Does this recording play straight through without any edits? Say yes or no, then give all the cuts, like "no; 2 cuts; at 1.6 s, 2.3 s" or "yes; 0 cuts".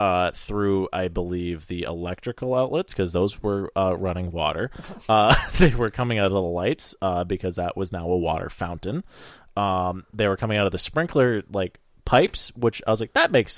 yes; 0 cuts